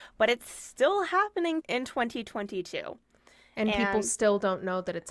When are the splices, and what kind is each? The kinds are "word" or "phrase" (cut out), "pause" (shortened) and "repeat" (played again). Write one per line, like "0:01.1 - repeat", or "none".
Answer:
0:01.6 - word